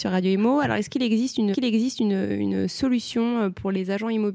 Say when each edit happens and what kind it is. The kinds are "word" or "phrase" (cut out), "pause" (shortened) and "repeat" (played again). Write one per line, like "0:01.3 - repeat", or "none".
0:01.5 - repeat